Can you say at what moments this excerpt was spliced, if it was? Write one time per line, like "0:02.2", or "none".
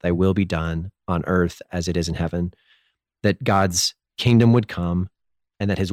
none